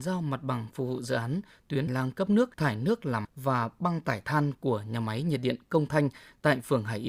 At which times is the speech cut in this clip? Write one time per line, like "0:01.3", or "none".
0:01.9
0:02.5
0:03.2

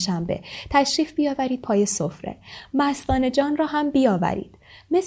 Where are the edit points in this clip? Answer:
none

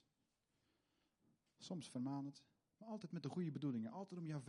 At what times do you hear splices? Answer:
none

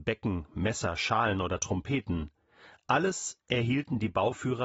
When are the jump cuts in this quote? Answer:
none

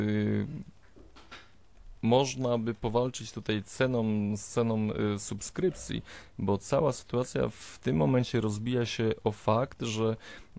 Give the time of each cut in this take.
0:02.0

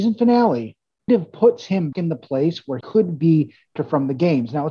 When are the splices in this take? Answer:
0:01.1
0:01.9
0:02.8
0:03.8

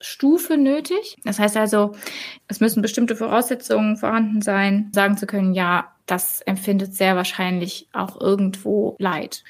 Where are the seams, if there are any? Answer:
0:04.9
0:06.0

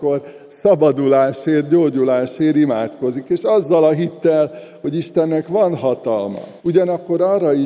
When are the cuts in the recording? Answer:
0:06.6

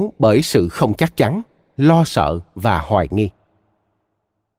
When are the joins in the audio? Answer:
none

